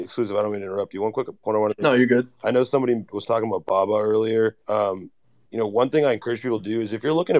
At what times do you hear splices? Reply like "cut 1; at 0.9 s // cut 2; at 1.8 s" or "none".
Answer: cut 1; at 4.6 s